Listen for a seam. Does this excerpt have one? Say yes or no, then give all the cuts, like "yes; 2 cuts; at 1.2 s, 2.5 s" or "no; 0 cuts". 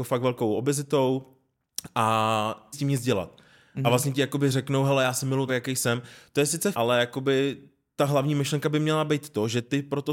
yes; 3 cuts; at 2.7 s, 5.5 s, 6.7 s